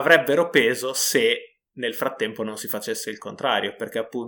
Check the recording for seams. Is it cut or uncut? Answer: cut